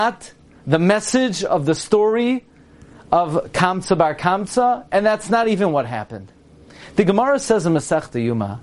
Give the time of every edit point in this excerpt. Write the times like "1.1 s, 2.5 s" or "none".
none